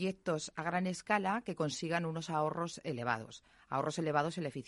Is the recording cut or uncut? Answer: uncut